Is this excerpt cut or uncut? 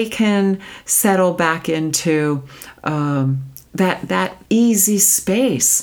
cut